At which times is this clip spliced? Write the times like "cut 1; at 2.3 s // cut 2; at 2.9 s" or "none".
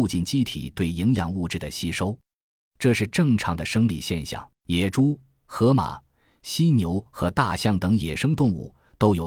cut 1; at 4.5 s